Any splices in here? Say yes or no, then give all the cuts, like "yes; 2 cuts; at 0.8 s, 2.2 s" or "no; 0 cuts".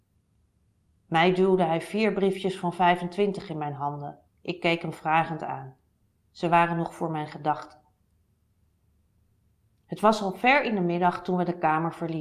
yes; 1 cut; at 4.3 s